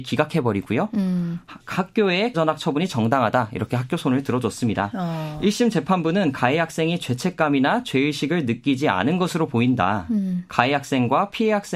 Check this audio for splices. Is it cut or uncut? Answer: cut